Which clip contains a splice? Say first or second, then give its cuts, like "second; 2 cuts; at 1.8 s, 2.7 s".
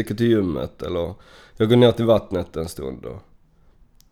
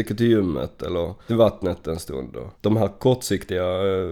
second; 2 cuts; at 1.3 s, 2.5 s